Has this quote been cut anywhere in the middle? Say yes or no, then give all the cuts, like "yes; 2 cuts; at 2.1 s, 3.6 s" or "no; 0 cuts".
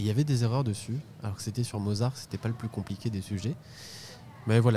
no; 0 cuts